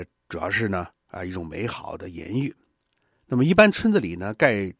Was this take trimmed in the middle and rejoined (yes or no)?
no